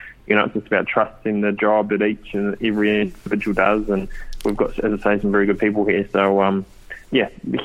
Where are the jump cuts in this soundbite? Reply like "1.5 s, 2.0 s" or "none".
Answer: none